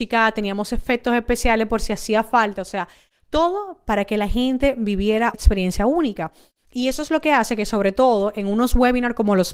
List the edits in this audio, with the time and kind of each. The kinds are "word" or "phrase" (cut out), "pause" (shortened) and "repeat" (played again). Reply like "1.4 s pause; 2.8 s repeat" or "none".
5.3 s word